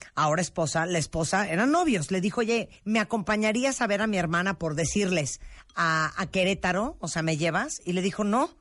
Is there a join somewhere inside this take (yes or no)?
yes